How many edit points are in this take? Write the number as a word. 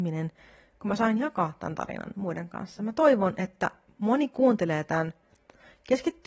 zero